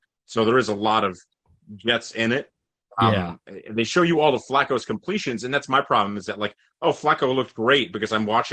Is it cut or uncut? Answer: uncut